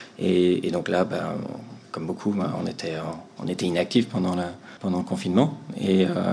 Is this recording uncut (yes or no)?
no